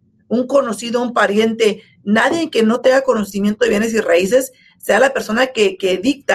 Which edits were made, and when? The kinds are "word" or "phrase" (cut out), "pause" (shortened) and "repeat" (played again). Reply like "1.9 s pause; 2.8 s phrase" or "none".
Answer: none